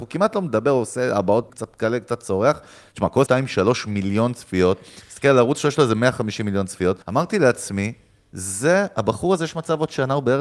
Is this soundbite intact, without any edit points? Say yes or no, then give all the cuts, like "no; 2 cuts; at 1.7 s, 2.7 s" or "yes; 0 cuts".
no; 3 cuts; at 1.5 s, 3.3 s, 7.0 s